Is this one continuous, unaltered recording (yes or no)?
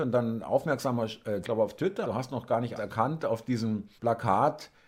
no